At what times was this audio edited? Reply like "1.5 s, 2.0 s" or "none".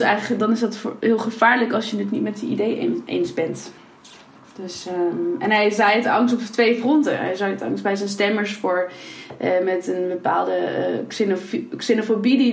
4.3 s